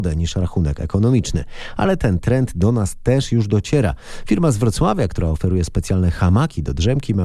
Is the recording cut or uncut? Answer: uncut